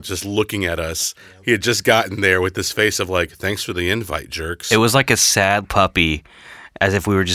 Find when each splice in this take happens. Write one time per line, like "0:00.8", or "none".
0:05.6